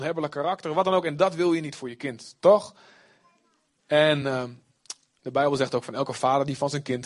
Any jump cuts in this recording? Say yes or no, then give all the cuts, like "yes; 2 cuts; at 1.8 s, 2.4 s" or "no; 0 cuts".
no; 0 cuts